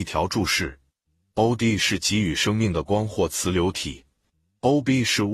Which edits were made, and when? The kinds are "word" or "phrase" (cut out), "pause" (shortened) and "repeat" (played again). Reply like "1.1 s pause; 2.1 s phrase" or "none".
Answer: none